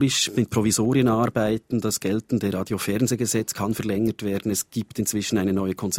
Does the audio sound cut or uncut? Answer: uncut